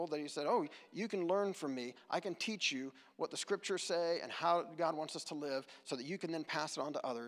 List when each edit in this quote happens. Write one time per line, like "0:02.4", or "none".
none